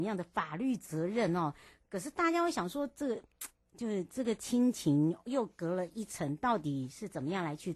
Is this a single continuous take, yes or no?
yes